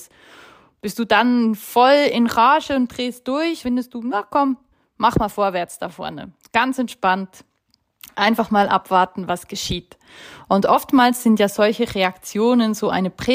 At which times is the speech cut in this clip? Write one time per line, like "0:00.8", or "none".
0:03.6
0:04.7